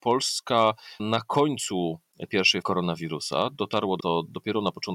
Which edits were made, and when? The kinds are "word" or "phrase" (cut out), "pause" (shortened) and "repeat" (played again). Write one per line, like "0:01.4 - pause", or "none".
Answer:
0:01.0 - word
0:02.3 - word
0:02.6 - word
0:04.0 - word